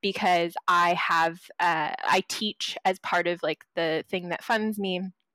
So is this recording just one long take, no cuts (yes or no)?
yes